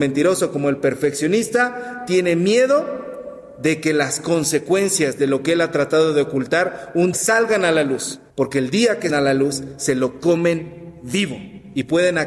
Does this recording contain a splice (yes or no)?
yes